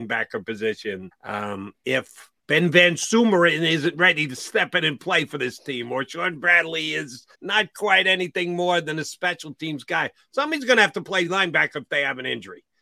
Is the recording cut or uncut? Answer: cut